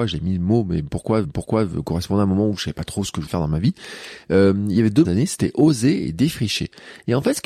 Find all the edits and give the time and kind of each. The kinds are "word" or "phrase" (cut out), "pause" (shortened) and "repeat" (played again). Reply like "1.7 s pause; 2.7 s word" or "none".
1.2 s repeat; 3.3 s word; 5.0 s phrase